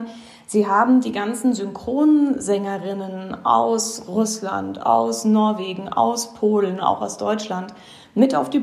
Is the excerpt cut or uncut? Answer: uncut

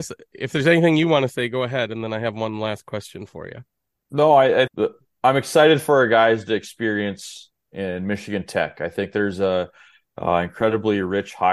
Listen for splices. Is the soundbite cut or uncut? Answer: cut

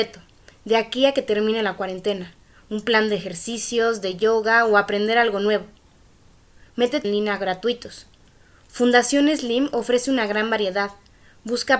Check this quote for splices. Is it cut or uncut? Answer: cut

